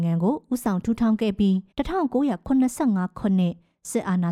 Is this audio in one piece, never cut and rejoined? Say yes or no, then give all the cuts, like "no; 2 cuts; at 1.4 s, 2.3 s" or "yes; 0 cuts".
no; 1 cut; at 1.7 s